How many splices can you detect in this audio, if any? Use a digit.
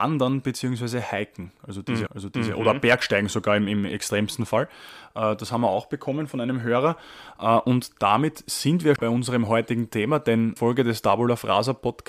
3